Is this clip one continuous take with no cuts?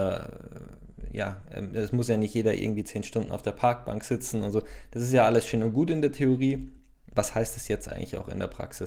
yes; 0 cuts

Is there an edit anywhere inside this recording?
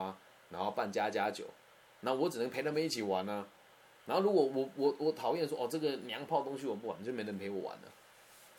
no; 0 cuts

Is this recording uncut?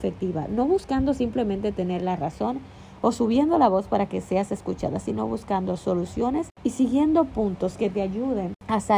yes; 0 cuts

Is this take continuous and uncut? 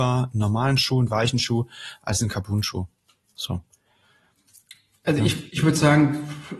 yes; 0 cuts

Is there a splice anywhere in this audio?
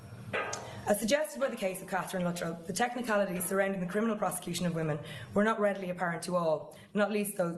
no; 0 cuts

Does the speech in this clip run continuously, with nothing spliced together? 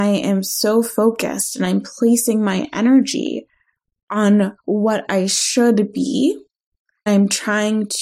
no; 2 cuts; at 4.6 s, 7.1 s

